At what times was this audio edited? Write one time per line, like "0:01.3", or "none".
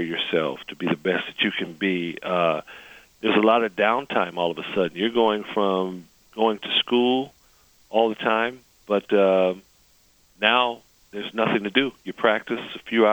0:11.0